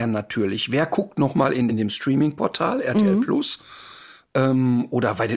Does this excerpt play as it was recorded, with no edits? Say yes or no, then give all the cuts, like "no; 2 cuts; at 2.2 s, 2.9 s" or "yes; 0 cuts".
no; 1 cut; at 1.7 s